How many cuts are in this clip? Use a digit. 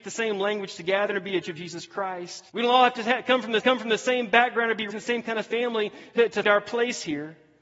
5